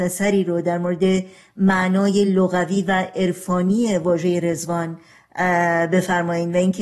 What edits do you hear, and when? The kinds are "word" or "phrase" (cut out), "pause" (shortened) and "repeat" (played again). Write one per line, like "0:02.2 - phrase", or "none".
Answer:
none